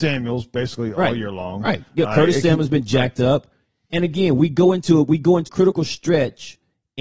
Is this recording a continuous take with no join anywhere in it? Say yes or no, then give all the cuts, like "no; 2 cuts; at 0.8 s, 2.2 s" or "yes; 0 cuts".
no; 1 cut; at 5.5 s